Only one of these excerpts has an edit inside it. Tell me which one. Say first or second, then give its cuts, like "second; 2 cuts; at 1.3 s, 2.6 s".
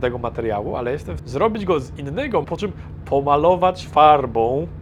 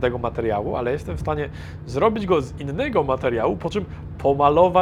first; 2 cuts; at 1.2 s, 2.4 s